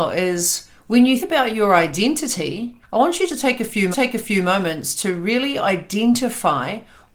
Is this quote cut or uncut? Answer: cut